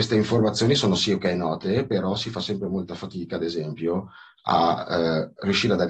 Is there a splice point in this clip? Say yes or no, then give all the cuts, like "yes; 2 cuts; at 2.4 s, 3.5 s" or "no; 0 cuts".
no; 0 cuts